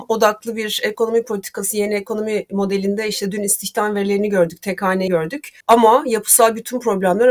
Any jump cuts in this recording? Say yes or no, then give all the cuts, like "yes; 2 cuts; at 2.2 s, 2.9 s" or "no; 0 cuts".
yes; 2 cuts; at 5.1 s, 5.6 s